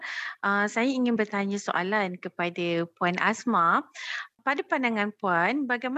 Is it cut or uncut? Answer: uncut